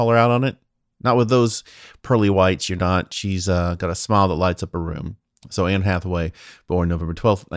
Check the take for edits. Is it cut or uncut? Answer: uncut